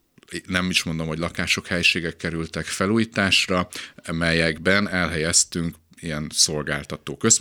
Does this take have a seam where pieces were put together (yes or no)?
no